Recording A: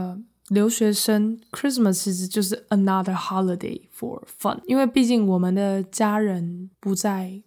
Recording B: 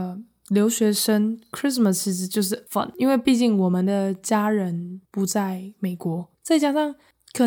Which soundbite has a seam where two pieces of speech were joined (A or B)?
B